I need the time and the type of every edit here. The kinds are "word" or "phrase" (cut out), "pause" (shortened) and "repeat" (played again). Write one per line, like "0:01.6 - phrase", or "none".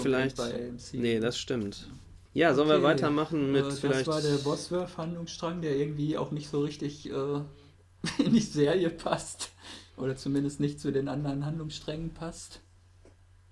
0:02.3 - pause
0:09.9 - pause